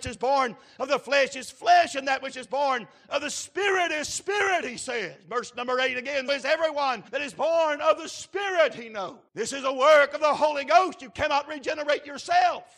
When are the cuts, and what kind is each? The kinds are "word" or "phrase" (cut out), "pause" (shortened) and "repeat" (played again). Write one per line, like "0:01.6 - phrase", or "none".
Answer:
0:06.3 - word
0:07.1 - pause
0:09.3 - pause